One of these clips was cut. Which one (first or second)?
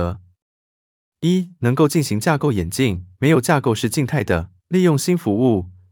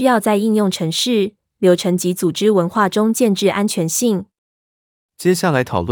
first